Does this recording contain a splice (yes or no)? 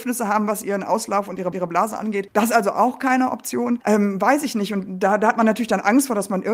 yes